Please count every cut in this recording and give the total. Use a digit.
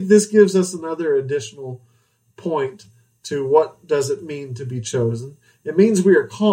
0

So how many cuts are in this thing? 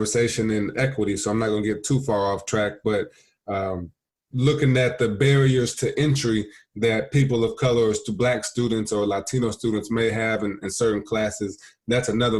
0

